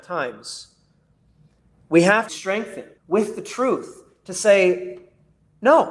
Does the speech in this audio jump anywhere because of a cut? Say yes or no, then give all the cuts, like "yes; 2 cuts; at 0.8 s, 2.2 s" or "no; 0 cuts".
yes; 2 cuts; at 2.3 s, 3.0 s